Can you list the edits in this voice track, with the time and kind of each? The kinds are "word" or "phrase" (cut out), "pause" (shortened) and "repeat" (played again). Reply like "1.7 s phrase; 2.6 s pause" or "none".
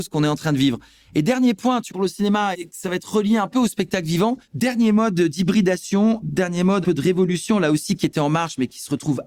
1.9 s word; 2.5 s word; 4.4 s pause; 6.8 s word